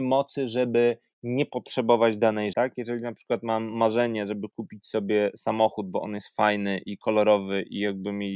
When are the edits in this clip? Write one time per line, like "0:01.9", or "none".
0:02.5